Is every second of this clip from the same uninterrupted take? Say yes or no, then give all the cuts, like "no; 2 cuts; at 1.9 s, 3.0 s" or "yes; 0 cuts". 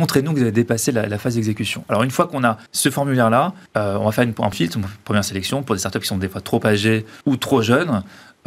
no; 4 cuts; at 2.7 s, 3.7 s, 4.5 s, 7.2 s